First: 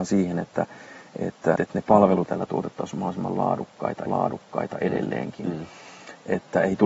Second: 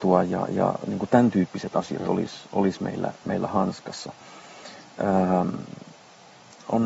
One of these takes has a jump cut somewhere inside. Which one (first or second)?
first